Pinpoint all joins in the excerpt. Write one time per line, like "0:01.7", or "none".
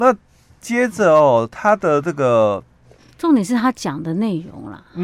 none